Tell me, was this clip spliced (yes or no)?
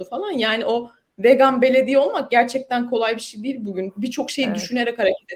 no